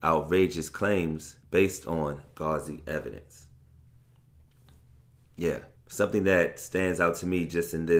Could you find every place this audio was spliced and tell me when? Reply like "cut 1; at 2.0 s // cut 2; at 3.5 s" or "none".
cut 1; at 1.4 s // cut 2; at 5.8 s